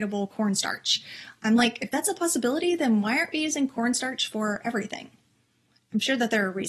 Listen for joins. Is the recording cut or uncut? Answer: uncut